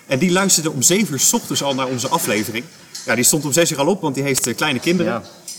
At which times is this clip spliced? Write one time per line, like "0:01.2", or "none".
none